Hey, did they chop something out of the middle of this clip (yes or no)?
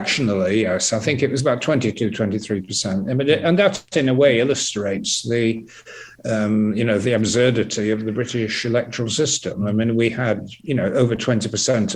no